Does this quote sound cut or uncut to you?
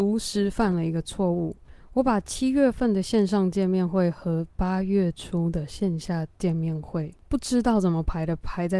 cut